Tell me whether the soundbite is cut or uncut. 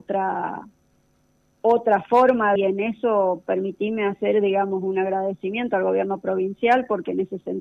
cut